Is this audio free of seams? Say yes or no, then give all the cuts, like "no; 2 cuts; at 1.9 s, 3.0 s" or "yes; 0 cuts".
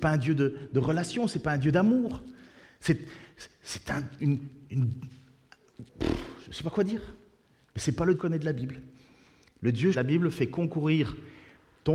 no; 2 cuts; at 8.1 s, 9.9 s